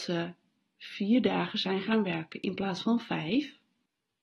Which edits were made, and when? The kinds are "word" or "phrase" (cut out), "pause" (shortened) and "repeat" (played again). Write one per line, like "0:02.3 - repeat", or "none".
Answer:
none